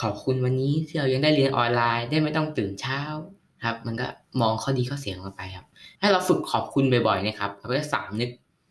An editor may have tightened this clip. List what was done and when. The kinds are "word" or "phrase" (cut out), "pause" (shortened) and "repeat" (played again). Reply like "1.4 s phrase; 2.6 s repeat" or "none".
3.4 s pause; 5.9 s pause